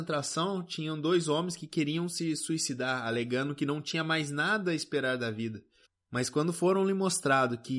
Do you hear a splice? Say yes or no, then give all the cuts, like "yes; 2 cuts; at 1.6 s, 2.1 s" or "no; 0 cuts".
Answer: yes; 1 cut; at 5.8 s